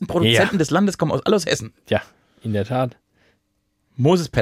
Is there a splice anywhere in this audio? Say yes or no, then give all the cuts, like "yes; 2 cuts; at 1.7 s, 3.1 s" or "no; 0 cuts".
no; 0 cuts